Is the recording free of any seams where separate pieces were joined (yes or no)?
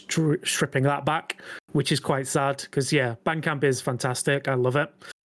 yes